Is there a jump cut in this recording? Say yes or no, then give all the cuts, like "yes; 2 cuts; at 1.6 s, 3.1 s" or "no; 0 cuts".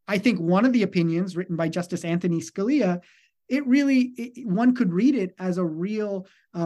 no; 0 cuts